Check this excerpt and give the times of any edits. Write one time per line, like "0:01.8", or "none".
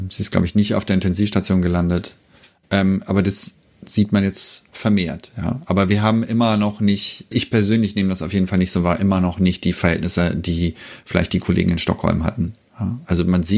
0:07.3